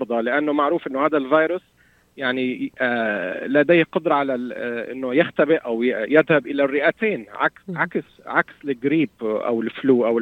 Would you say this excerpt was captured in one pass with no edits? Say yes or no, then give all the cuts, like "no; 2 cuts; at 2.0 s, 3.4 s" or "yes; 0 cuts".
yes; 0 cuts